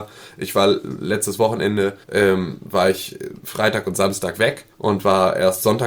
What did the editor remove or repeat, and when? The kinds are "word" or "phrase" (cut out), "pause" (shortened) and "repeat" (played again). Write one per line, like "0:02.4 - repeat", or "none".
0:02.0 - pause
0:04.7 - pause